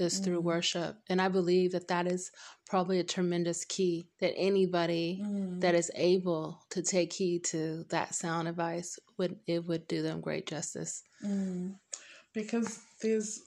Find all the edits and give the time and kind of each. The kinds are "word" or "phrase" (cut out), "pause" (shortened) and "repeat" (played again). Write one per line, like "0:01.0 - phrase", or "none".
0:04.1 - pause